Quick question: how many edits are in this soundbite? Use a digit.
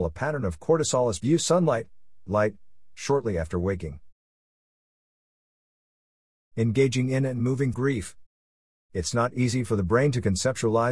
3